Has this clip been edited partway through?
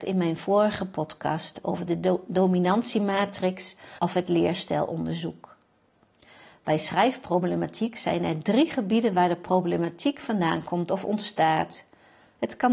no; 0 cuts

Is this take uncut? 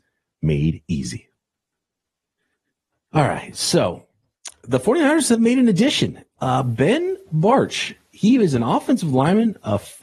yes; 0 cuts

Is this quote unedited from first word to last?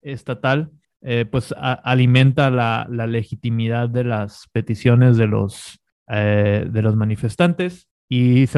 yes; 0 cuts

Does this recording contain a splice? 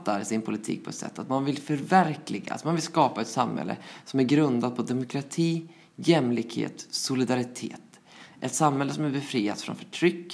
no; 0 cuts

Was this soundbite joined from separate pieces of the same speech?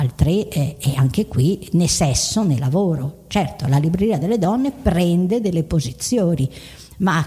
no; 0 cuts

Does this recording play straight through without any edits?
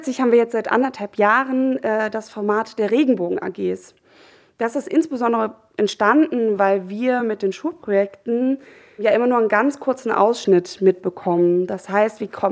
yes; 0 cuts

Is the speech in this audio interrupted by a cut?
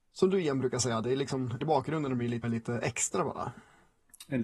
yes; 2 cuts; at 1.6 s, 2.4 s

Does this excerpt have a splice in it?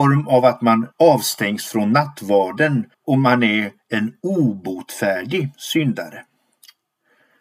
yes; 2 cuts; at 0.9 s, 2.9 s

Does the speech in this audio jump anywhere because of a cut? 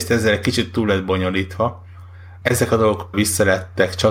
yes; 2 cuts; at 2.4 s, 3.1 s

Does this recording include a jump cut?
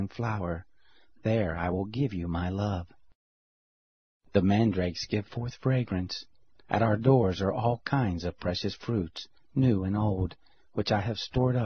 no; 0 cuts

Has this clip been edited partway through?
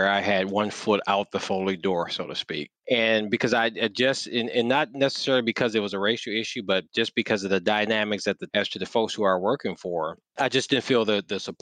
yes; 3 cuts; at 2.8 s, 8.5 s, 10.3 s

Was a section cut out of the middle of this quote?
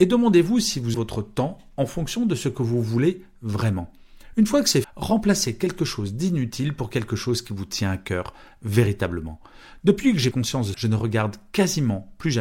yes; 4 cuts; at 0.9 s, 4.8 s, 10.3 s, 10.7 s

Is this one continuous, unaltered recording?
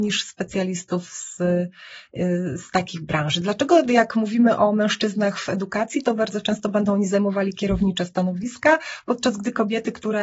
yes; 0 cuts

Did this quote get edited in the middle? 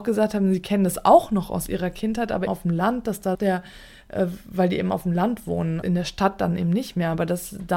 yes; 3 cuts; at 2.5 s, 3.3 s, 5.8 s

